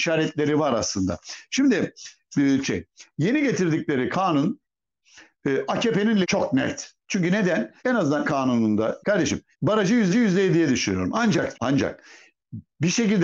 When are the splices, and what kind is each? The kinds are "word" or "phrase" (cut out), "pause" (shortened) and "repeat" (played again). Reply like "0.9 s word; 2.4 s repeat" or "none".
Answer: 2.6 s phrase; 6.2 s word; 7.8 s pause; 8.2 s word; 9.0 s phrase; 9.5 s pause; 10.1 s repeat; 11.5 s word